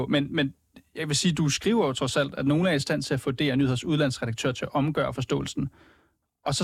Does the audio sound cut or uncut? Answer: uncut